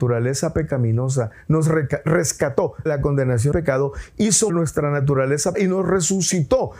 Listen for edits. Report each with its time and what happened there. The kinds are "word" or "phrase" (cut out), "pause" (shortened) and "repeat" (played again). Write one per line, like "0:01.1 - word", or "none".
0:02.9 - word
0:03.5 - word
0:04.5 - word
0:05.5 - word